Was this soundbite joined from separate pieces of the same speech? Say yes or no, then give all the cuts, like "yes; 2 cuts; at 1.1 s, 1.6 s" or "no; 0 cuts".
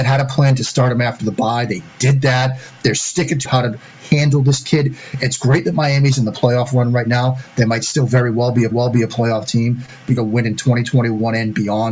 yes; 3 cuts; at 3.4 s, 8.7 s, 10.2 s